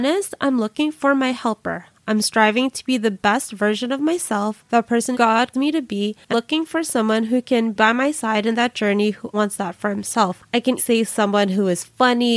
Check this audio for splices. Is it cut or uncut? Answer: cut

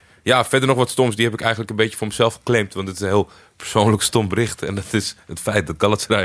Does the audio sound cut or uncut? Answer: uncut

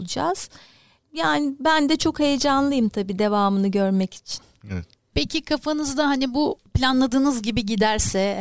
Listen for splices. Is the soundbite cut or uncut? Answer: uncut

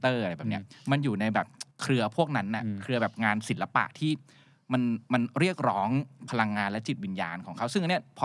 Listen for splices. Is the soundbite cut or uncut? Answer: cut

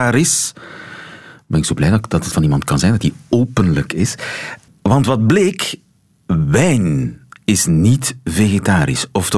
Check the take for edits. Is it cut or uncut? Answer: uncut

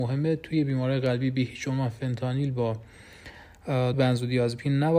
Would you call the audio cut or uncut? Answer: cut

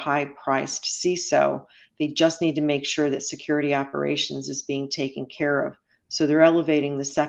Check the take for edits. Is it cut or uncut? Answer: uncut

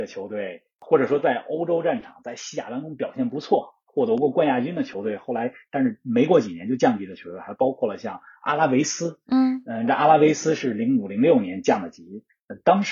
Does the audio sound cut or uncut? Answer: uncut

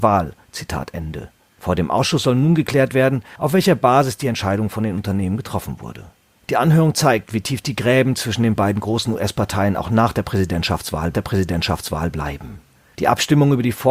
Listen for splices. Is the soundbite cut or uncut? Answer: cut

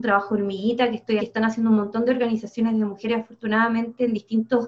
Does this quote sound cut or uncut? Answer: cut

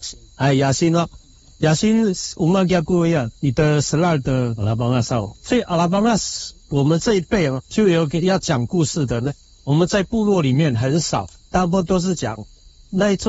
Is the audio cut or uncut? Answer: cut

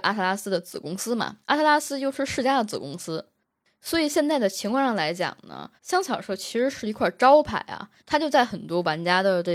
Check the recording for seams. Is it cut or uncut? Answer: cut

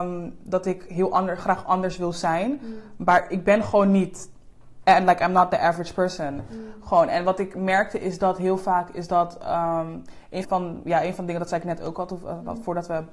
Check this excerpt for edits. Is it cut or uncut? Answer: cut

